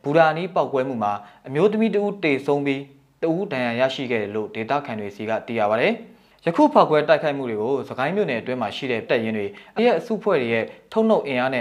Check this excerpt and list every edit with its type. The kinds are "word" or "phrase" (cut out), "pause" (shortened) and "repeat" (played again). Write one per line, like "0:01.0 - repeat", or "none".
0:09.1 - word
0:09.8 - word